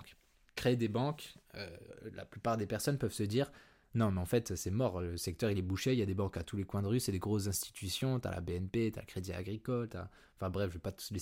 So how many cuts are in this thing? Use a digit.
0